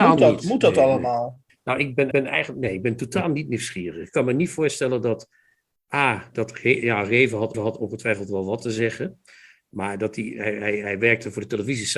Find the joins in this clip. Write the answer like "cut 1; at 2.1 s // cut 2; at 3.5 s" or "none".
cut 1; at 1.5 s // cut 2; at 2.1 s // cut 3; at 6.3 s // cut 4; at 7.5 s